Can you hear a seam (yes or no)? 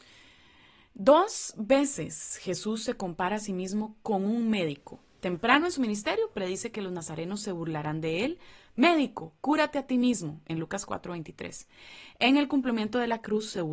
no